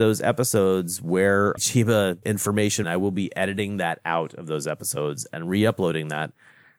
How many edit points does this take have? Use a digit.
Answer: 2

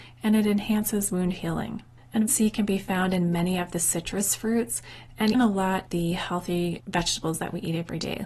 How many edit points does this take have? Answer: 3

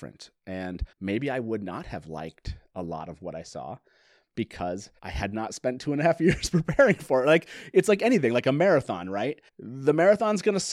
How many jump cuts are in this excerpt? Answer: 3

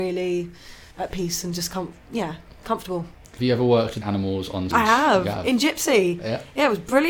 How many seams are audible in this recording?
4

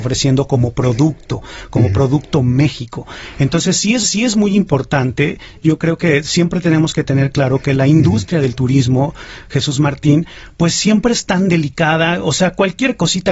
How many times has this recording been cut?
1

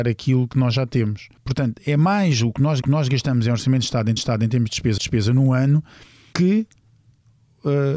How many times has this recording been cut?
5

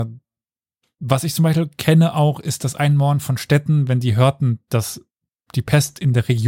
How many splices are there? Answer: 0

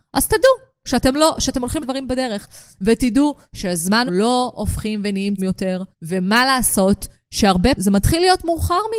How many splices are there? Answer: 5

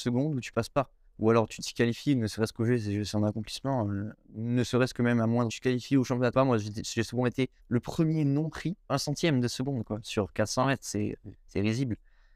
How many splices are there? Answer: 7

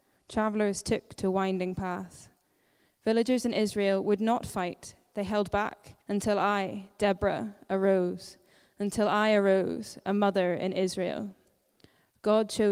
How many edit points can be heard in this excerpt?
1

